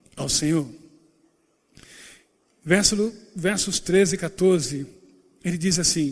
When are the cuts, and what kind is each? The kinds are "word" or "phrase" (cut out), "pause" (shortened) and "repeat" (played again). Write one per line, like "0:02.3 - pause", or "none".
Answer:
none